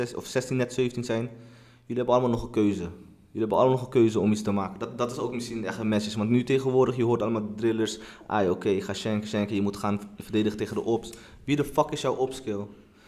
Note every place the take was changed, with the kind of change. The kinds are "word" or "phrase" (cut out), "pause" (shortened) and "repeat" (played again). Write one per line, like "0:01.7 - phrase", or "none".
none